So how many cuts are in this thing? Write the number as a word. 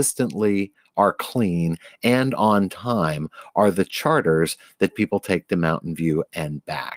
zero